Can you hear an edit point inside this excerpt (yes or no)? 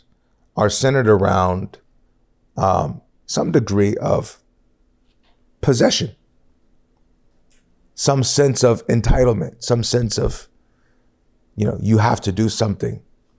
no